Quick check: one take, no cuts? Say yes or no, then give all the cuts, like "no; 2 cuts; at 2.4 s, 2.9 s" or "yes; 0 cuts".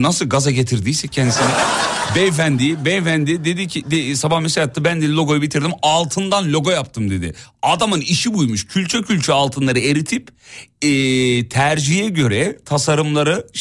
yes; 0 cuts